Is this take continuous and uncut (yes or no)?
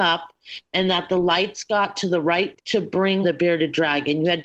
no